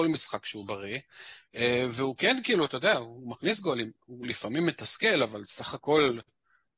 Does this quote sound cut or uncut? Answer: uncut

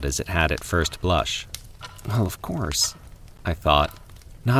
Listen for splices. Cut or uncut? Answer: uncut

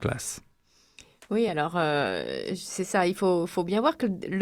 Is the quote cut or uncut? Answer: uncut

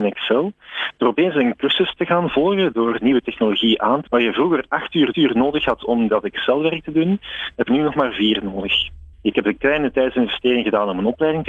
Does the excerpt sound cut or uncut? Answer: cut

